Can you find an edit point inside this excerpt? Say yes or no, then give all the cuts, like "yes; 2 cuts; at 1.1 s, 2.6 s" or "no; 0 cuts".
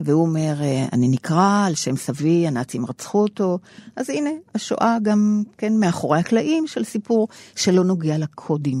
no; 0 cuts